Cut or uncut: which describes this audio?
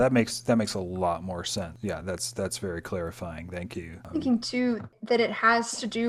uncut